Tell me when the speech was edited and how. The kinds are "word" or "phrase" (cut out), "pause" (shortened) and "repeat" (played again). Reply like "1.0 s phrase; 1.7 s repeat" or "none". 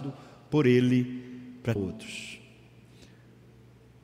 1.8 s word